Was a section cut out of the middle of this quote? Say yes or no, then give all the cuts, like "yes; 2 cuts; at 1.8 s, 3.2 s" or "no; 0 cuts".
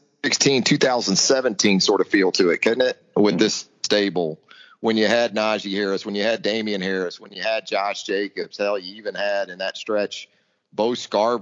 no; 0 cuts